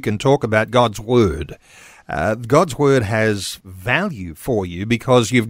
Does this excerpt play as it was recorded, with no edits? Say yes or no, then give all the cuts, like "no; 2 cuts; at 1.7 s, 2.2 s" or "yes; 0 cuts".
yes; 0 cuts